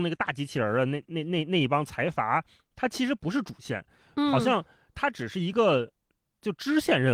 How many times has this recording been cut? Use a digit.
0